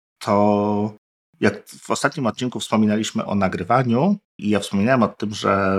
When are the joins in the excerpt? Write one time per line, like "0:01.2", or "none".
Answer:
0:03.3
0:04.4

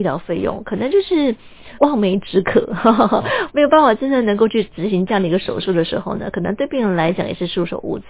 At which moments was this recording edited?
0:01.8

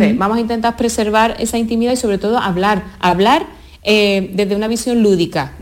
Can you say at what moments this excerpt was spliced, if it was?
none

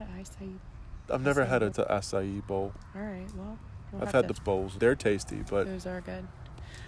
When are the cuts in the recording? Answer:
0:01.7
0:04.4
0:04.8

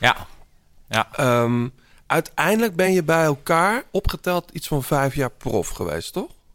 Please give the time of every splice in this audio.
none

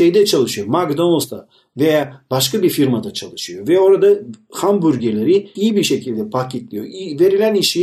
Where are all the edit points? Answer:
0:05.6

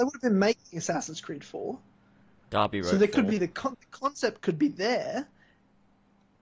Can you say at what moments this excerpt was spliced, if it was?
none

